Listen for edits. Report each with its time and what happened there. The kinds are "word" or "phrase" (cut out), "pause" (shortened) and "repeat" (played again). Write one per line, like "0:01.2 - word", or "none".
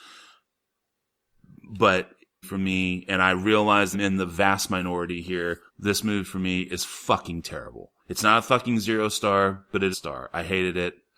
0:02.4 - phrase
0:03.9 - phrase
0:05.7 - pause
0:08.0 - pause
0:09.9 - phrase